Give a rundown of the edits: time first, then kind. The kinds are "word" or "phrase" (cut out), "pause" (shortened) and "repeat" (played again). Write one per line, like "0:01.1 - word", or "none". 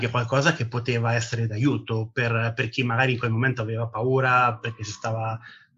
none